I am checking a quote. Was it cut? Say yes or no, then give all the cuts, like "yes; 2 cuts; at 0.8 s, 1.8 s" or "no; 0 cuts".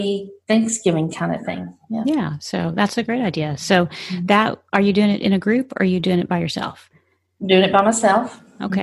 no; 0 cuts